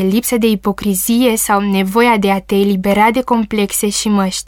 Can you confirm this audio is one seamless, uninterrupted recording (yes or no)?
yes